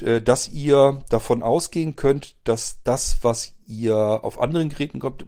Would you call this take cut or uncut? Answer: uncut